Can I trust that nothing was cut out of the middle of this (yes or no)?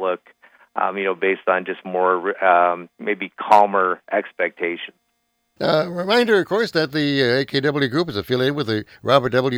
yes